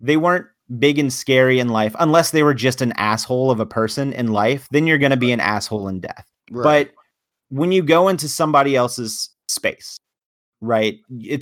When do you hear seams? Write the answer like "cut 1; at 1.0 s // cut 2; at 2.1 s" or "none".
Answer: cut 1; at 6.4 s